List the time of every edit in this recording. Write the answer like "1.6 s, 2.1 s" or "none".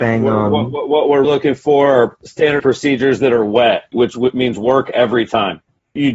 1.2 s, 2.6 s